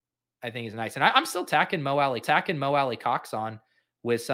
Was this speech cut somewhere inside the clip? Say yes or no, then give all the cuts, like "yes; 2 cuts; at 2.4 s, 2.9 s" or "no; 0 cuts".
yes; 1 cut; at 2.2 s